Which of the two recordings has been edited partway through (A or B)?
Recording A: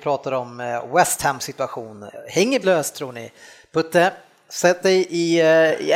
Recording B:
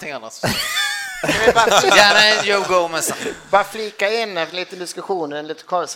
A